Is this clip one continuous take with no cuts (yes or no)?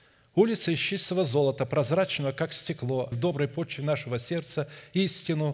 no